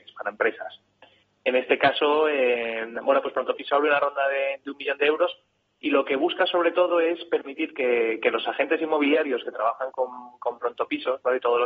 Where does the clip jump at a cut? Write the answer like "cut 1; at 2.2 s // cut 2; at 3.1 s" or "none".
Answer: none